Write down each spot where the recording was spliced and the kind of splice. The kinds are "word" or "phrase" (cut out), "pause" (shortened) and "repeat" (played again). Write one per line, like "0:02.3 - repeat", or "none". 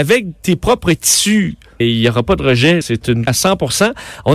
0:01.8 - word
0:02.8 - word
0:03.3 - word